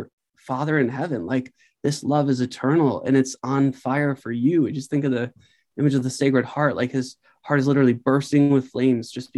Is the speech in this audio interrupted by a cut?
no; 0 cuts

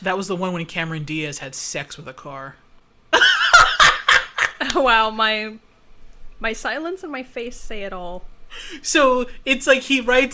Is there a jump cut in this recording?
no; 0 cuts

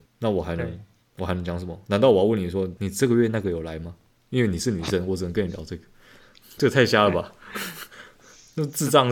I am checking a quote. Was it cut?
no; 0 cuts

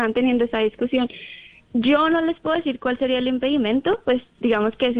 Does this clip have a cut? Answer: no; 0 cuts

